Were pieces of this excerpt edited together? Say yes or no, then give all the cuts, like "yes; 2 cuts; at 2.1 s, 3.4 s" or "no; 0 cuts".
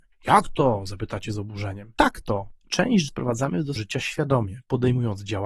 yes; 2 cuts; at 3.1 s, 3.8 s